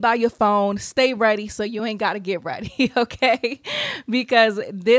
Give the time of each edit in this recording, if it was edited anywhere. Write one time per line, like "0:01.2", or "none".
none